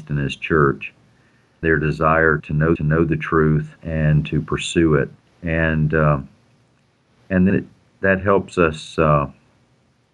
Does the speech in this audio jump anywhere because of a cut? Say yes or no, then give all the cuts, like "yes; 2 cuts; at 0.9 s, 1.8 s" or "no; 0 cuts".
yes; 6 cuts; at 1.6 s, 2.4 s, 2.8 s, 3.8 s, 5.2 s, 7.5 s